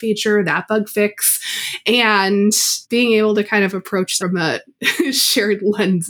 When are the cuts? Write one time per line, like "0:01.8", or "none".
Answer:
0:02.8
0:04.2

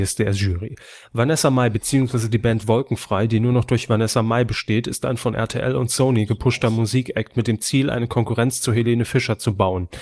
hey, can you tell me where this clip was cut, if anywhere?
none

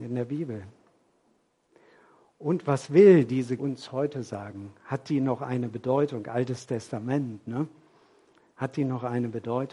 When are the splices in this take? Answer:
0:03.6

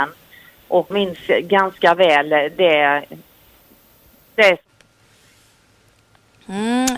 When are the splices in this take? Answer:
0:00.9

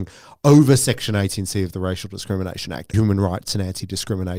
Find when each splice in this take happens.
0:02.9

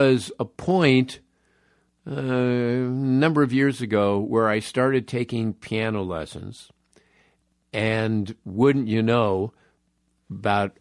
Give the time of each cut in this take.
none

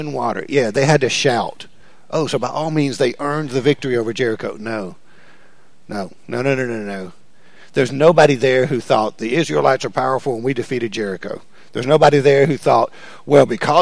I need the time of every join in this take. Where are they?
none

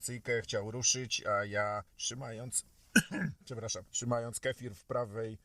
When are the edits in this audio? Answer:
0:01.9
0:03.9

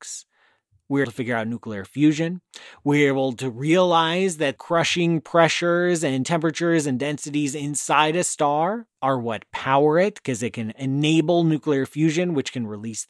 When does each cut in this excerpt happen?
0:01.0
0:04.6
0:08.9

